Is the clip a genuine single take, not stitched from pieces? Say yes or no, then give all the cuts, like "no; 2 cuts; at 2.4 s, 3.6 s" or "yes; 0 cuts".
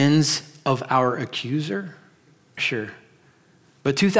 no; 1 cut; at 2.6 s